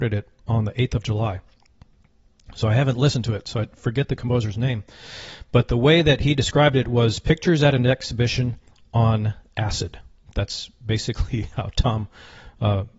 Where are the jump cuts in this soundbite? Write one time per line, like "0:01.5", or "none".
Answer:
none